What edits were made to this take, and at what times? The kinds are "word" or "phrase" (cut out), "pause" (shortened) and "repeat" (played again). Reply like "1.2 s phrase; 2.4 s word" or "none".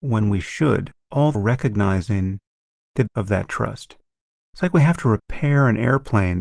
1.0 s pause; 1.3 s word; 3.1 s phrase